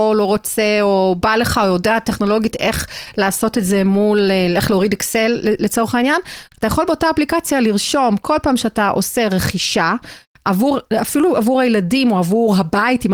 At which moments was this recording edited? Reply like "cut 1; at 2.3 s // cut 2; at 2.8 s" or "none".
cut 1; at 10.9 s